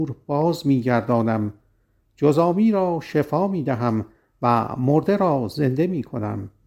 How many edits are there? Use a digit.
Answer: 0